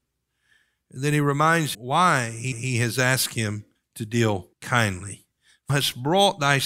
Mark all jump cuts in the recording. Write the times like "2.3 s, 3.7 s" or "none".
1.7 s, 2.5 s, 3.8 s, 4.5 s, 5.7 s